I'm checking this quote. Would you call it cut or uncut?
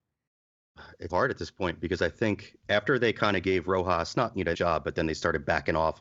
cut